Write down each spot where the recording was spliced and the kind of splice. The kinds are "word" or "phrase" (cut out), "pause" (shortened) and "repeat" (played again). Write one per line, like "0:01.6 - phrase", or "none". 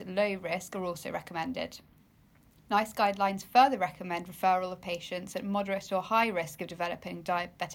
none